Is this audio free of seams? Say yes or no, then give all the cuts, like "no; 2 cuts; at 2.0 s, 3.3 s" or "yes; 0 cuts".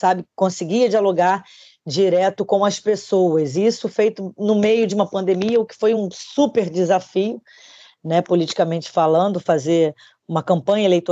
yes; 0 cuts